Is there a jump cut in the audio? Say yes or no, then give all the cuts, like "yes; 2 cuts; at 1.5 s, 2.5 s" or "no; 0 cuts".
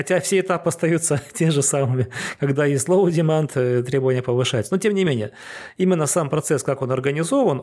no; 0 cuts